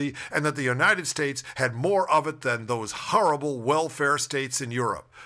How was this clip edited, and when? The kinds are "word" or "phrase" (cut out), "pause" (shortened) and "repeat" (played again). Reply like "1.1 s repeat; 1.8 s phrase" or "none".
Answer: none